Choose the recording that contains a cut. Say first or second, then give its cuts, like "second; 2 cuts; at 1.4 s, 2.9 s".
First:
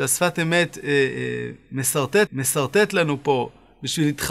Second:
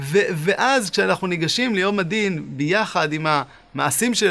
first; 1 cut; at 2.3 s